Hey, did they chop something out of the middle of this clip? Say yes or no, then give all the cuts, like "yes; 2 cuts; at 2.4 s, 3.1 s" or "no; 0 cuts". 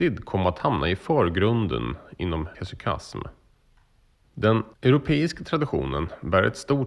yes; 1 cut; at 2.5 s